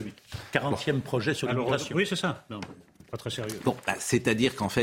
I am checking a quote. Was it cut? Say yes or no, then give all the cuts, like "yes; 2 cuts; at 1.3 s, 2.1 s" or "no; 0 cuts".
no; 0 cuts